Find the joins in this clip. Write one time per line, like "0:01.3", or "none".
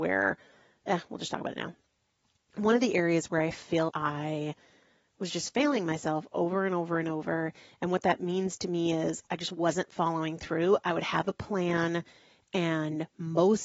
0:03.9